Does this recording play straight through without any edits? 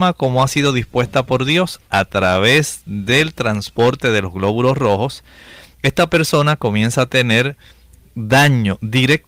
yes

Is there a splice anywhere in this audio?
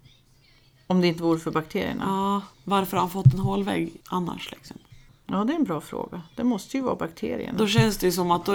yes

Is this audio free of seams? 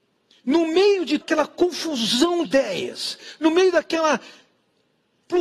no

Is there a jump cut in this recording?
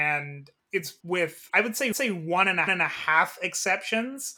yes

